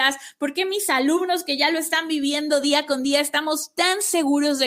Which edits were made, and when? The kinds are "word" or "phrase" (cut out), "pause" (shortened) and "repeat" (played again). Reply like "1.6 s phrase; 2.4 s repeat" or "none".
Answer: none